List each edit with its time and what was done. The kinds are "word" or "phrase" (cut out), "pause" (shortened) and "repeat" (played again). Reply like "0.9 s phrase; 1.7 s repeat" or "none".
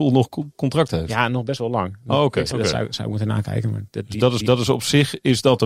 2.5 s phrase; 4.4 s repeat